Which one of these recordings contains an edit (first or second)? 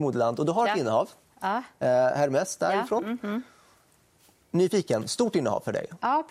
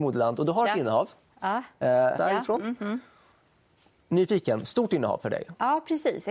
second